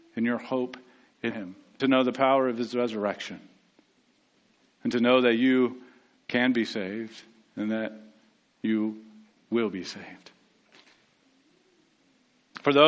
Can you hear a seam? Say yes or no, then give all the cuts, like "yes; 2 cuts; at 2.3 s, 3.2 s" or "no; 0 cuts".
yes; 2 cuts; at 1.3 s, 1.8 s